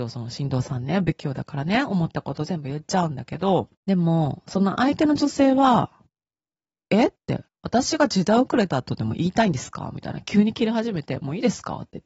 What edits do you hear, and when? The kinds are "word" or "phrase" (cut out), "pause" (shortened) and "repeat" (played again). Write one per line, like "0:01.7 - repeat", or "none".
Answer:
0:03.7 - pause